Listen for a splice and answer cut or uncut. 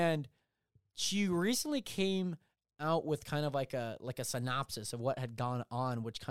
uncut